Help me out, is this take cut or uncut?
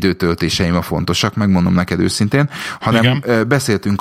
uncut